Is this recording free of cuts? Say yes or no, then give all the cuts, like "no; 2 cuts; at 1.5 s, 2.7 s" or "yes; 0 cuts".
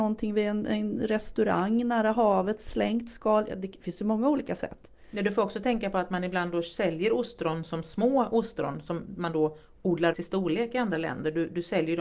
no; 1 cut; at 10.1 s